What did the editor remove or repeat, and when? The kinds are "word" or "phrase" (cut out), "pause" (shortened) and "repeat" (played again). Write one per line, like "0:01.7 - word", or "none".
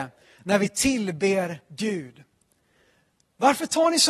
none